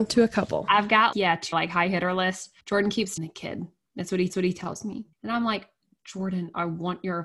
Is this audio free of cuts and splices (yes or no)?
no